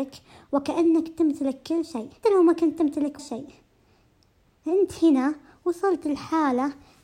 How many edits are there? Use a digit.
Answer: 2